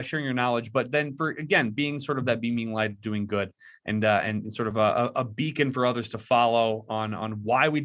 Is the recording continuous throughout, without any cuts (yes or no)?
no